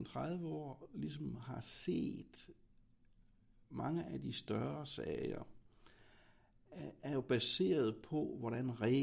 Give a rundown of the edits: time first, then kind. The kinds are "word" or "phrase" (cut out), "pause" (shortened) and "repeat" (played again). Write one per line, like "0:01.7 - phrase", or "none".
none